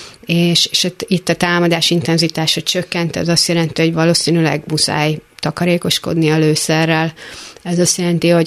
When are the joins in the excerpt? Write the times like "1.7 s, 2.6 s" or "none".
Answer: none